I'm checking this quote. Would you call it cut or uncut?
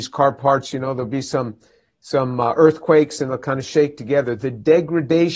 uncut